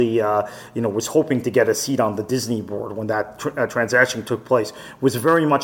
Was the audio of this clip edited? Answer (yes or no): no